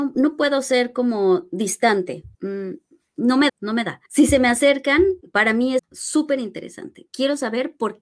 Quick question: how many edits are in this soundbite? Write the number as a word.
five